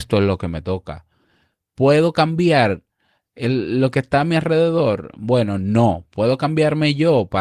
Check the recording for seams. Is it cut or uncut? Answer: uncut